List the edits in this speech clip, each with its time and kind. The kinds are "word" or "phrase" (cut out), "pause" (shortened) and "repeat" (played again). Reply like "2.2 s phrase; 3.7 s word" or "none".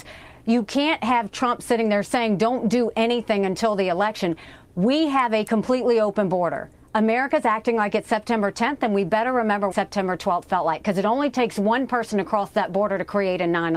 4.6 s pause; 9.7 s word